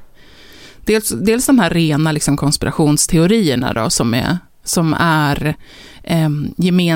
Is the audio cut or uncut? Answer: uncut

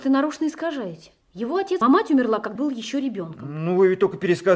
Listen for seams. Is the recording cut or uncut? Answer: cut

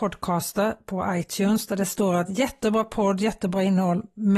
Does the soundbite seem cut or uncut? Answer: uncut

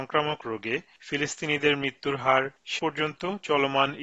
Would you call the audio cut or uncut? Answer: cut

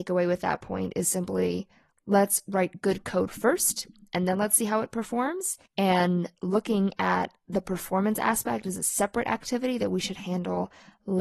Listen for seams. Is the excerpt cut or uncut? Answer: cut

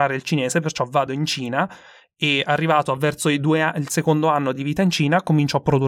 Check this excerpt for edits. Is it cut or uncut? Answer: uncut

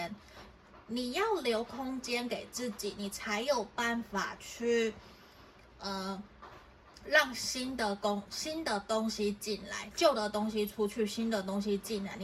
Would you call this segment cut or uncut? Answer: uncut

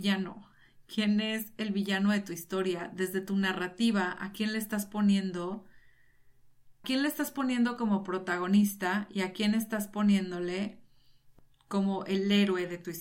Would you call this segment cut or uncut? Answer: cut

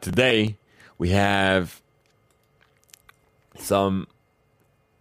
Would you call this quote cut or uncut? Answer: uncut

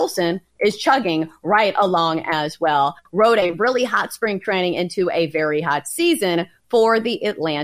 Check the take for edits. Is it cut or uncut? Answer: uncut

